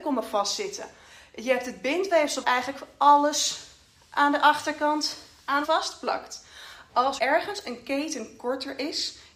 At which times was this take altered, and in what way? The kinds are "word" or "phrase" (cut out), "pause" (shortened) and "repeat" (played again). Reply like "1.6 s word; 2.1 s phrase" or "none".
2.4 s word; 5.6 s word; 7.2 s word